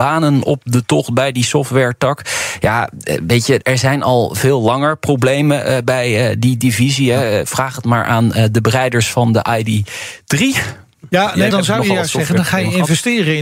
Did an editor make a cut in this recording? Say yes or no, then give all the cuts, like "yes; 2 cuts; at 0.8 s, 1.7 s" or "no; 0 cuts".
yes; 2 cuts; at 3.6 s, 11.5 s